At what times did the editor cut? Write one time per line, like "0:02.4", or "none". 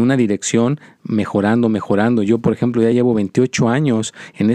none